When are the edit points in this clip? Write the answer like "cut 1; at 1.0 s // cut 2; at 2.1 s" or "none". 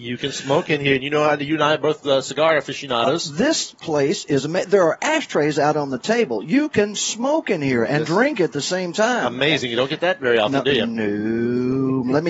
none